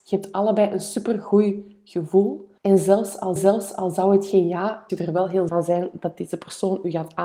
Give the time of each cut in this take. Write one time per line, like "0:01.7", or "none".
0:02.6
0:03.4
0:04.9
0:05.5